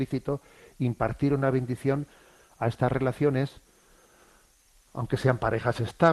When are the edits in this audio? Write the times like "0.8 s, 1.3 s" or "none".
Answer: none